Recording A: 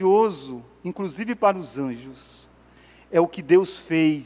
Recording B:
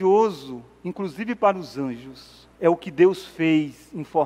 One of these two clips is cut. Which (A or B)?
B